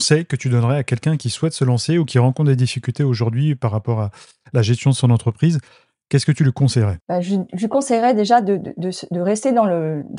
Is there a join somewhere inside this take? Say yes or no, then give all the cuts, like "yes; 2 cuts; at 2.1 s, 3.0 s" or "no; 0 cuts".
no; 0 cuts